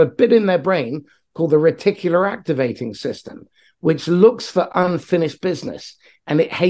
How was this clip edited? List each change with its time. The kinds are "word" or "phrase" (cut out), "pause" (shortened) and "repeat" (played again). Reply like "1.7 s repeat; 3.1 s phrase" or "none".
none

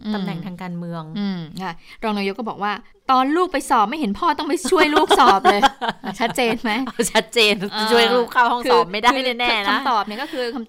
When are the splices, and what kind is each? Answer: 2.9 s pause

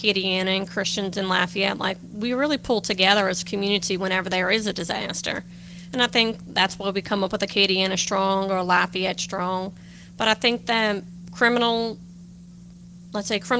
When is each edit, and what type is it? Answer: none

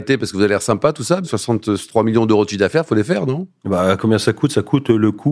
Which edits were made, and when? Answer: 1.2 s word

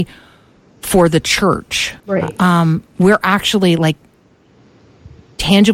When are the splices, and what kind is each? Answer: 2.0 s pause

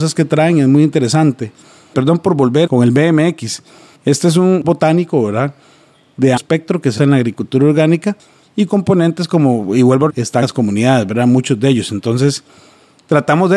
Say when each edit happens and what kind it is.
2.7 s word; 4.6 s word; 6.4 s word; 7.0 s word; 8.7 s word; 10.1 s word; 10.4 s word

